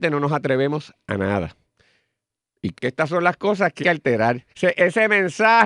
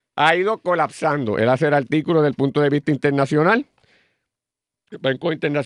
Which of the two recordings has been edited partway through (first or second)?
first